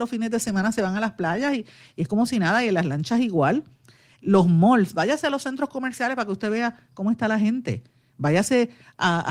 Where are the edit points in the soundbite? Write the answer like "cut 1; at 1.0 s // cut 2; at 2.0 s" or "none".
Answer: none